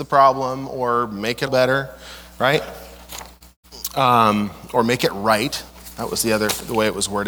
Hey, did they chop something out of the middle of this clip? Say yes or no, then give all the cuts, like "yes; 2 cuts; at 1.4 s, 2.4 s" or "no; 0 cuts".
yes; 1 cut; at 1.5 s